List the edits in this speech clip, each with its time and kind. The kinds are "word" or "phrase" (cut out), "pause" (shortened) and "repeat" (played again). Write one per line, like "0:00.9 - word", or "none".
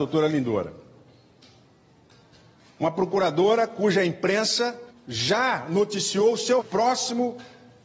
0:04.9 - pause
0:06.6 - word